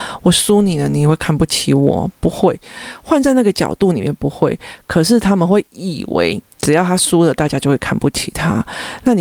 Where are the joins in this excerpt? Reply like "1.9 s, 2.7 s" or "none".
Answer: 6.5 s